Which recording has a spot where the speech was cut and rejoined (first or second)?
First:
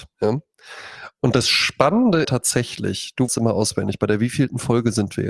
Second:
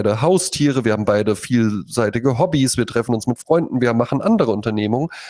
first